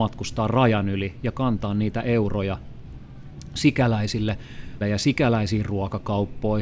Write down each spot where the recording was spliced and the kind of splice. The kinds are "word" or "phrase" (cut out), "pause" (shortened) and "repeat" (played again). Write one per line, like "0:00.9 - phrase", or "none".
0:04.8 - word

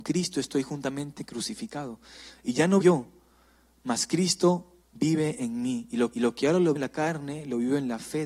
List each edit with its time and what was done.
0:02.8 - word
0:04.8 - pause
0:06.1 - repeat
0:06.8 - word

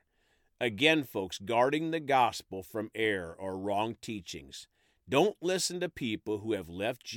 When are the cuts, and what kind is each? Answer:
none

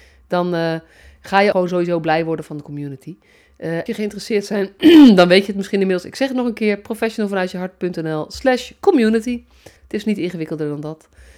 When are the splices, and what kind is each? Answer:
0:01.5 - word
0:03.9 - phrase
0:09.8 - pause

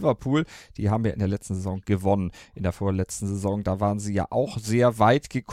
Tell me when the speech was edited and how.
none

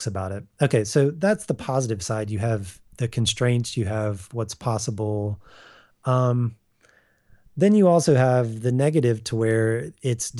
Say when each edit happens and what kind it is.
none

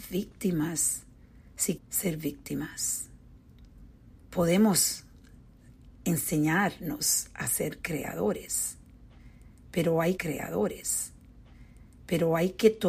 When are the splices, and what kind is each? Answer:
0:01.8 - word
0:05.9 - pause
0:10.2 - repeat

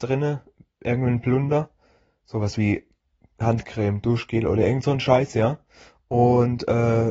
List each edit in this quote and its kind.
none

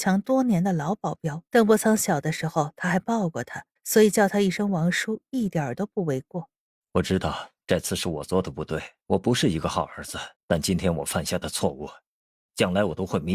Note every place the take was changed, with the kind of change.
0:01.5 - pause
0:03.8 - pause
0:06.7 - pause
0:07.6 - pause
0:09.0 - pause
0:10.3 - pause

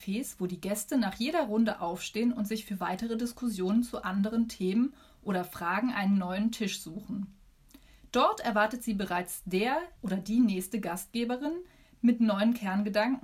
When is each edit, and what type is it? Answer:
0:10.0 - pause

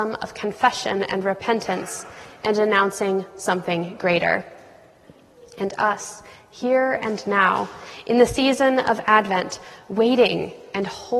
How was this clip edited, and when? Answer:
none

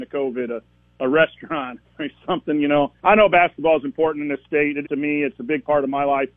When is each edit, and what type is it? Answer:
0:01.8 - word
0:03.0 - pause
0:04.8 - word

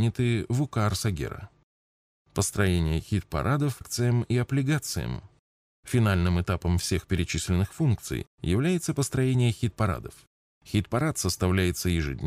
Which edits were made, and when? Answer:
0:03.8 - word

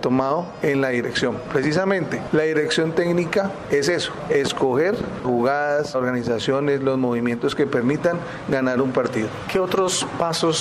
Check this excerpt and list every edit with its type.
0:05.2 - word
0:05.9 - word

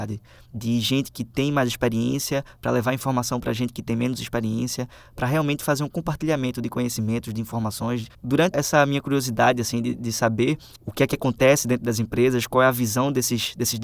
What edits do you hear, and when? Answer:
0:08.5 - word

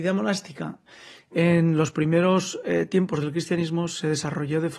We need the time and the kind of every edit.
none

